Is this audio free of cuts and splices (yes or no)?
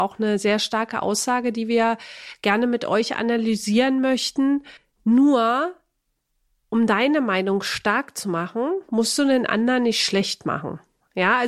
no